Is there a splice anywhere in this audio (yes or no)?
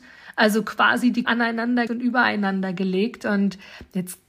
yes